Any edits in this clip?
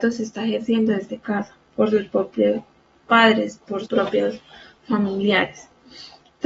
yes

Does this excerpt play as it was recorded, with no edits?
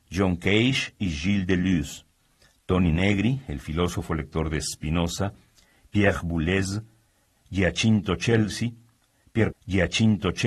no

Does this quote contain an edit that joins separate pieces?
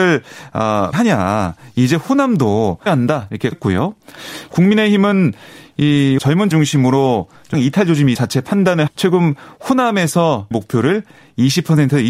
yes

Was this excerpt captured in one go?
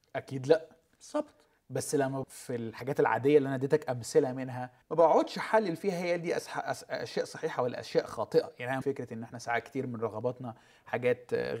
no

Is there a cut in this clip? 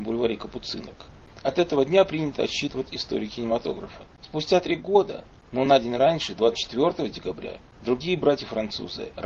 no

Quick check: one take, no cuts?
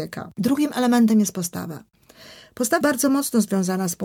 no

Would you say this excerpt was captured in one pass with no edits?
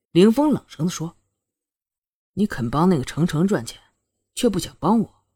yes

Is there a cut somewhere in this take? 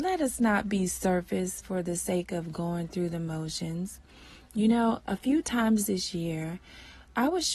no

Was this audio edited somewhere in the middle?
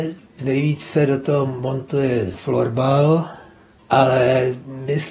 no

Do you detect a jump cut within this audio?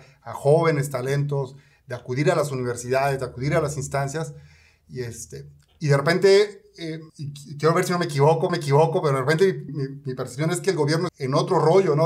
yes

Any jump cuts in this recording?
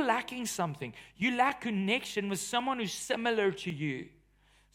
no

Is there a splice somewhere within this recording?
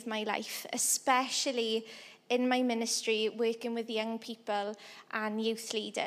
no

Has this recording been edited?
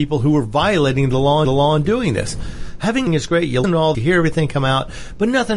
yes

